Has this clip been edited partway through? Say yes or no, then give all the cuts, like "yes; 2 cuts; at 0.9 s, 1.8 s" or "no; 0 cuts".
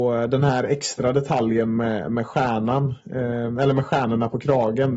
no; 0 cuts